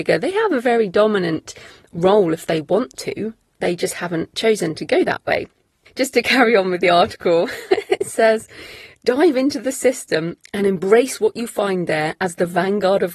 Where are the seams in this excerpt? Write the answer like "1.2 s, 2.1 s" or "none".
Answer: none